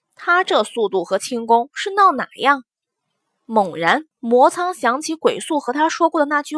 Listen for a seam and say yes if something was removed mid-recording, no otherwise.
yes